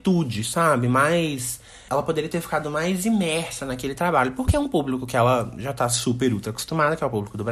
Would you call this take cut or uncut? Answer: uncut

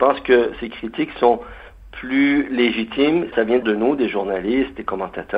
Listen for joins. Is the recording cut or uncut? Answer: cut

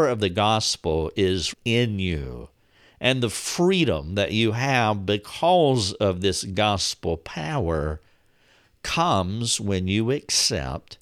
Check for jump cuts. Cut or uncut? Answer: cut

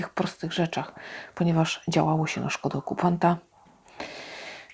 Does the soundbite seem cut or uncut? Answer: uncut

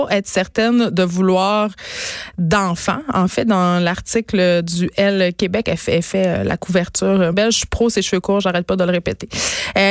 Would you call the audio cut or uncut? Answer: cut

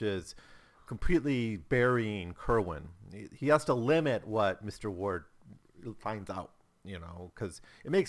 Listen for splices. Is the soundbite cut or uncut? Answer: uncut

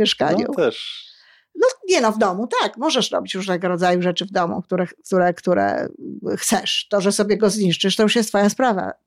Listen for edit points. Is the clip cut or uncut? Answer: uncut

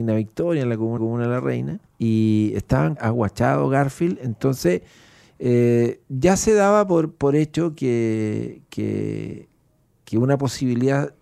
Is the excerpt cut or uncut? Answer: cut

